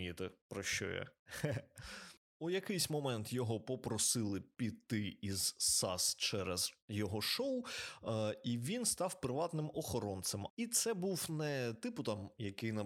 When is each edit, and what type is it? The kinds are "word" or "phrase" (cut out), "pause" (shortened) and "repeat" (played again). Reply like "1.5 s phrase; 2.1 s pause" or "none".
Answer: none